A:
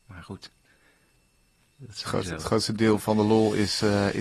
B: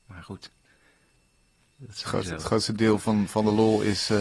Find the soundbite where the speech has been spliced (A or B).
A